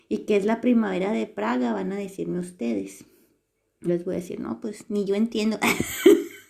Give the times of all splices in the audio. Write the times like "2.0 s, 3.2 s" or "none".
3.9 s